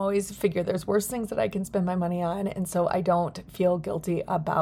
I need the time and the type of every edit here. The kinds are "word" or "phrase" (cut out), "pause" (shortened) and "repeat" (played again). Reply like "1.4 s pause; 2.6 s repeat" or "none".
none